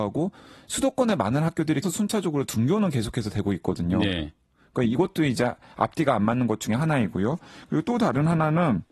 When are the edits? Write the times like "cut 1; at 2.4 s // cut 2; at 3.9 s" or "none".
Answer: cut 1; at 1.8 s